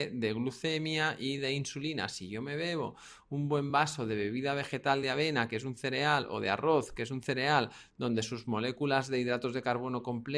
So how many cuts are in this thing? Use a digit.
0